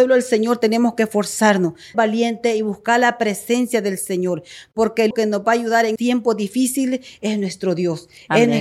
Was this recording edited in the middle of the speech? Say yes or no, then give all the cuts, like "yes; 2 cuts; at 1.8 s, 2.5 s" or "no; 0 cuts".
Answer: yes; 3 cuts; at 1.9 s, 5.1 s, 6.0 s